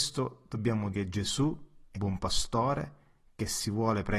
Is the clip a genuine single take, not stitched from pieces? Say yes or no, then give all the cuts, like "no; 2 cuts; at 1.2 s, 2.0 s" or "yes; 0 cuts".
no; 2 cuts; at 0.9 s, 1.9 s